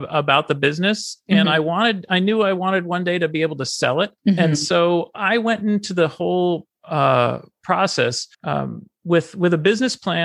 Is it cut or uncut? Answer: cut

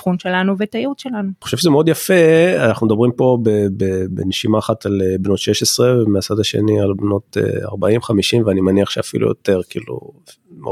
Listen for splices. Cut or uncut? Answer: uncut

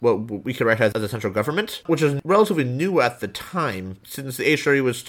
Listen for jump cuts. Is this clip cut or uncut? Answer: uncut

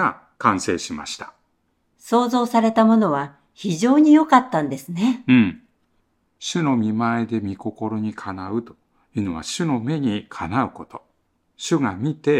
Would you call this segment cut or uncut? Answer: uncut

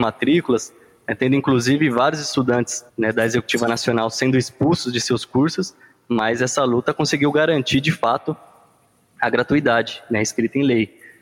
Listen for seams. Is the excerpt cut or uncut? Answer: cut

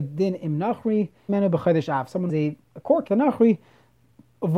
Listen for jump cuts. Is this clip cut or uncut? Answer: cut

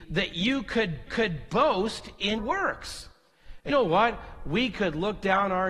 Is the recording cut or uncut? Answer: cut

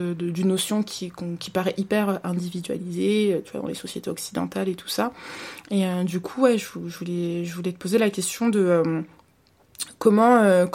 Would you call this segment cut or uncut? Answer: uncut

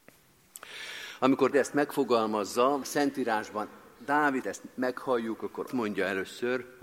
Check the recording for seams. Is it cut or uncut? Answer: cut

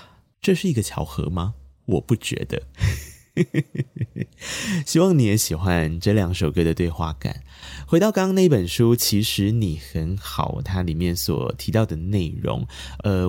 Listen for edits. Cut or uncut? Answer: uncut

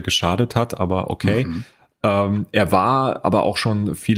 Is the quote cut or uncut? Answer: uncut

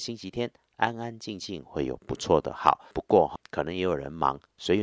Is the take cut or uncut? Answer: cut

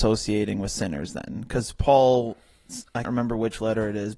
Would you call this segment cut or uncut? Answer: cut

